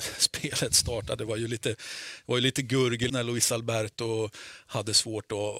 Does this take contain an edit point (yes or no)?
yes